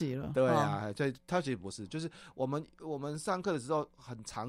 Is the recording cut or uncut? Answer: uncut